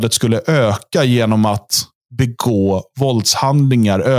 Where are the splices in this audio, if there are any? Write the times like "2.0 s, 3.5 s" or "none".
none